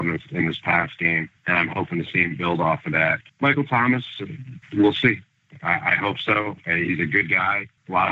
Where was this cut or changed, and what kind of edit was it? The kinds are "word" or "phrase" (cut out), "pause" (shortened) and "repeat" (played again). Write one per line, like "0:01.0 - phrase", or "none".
0:01.4 - pause
0:03.3 - pause